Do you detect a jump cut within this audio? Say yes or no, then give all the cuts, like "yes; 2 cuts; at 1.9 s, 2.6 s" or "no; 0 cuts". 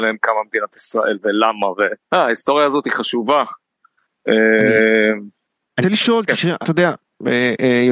yes; 3 cuts; at 2.0 s, 5.8 s, 6.6 s